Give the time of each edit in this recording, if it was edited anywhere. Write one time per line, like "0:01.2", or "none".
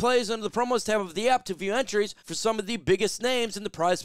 0:02.2